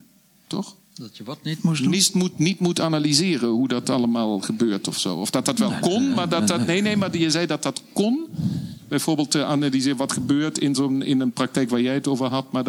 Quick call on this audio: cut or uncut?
uncut